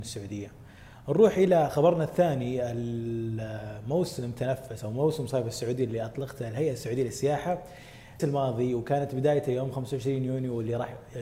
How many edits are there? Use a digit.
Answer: 1